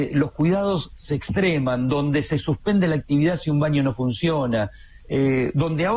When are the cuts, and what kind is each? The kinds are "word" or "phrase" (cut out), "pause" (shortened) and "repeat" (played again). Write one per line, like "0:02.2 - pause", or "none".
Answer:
0:05.0 - pause